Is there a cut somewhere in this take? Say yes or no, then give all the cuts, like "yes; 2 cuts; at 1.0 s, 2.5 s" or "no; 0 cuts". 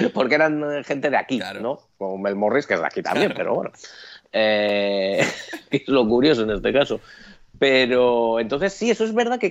no; 0 cuts